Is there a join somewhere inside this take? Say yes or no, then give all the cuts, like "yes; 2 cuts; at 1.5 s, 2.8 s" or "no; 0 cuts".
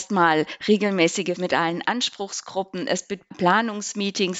yes; 1 cut; at 1.4 s